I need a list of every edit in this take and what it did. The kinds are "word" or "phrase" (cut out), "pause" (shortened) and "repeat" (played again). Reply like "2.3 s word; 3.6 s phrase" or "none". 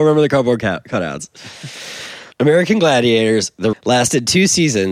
2.3 s pause; 3.7 s word